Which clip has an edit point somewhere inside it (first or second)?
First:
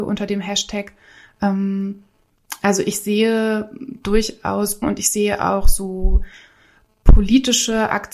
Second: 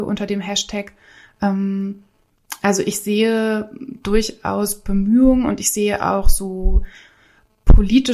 first